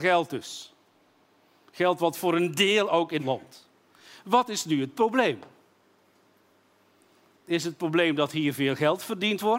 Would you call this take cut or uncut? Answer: cut